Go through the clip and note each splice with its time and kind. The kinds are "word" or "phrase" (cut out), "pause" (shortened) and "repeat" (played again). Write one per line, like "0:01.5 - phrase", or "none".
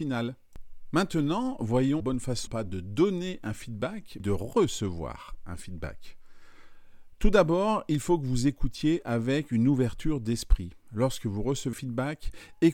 0:02.0 - word
0:02.5 - word
0:04.2 - word
0:11.7 - word